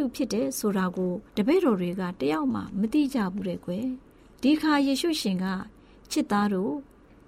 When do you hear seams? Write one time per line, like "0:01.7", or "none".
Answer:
0:01.3